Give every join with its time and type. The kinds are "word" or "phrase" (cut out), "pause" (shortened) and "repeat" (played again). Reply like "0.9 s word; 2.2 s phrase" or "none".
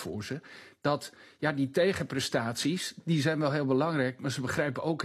none